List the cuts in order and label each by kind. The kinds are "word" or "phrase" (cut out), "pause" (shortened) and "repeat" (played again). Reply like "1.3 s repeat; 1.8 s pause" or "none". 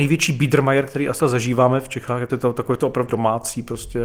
1.2 s word; 2.3 s word; 3.1 s word